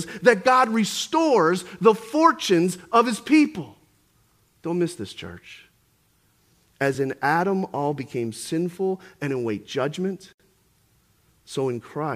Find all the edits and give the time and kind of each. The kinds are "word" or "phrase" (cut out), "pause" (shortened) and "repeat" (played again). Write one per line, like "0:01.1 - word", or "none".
none